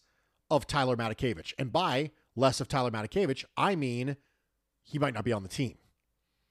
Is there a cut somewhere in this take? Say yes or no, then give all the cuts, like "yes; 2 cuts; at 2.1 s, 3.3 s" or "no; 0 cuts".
no; 0 cuts